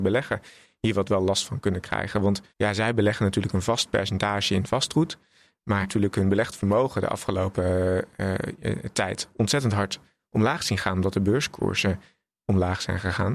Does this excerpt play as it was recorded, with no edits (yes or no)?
no